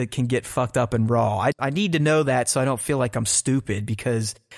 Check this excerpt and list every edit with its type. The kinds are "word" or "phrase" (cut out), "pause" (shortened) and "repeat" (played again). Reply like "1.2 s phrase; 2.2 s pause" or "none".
1.5 s word